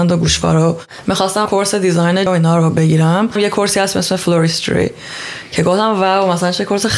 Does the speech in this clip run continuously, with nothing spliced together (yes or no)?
no